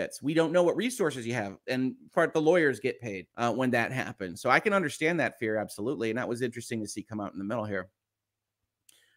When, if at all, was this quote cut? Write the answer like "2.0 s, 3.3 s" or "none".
2.1 s, 3.3 s